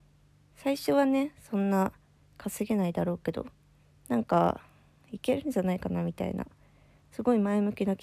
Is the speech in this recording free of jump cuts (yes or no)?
yes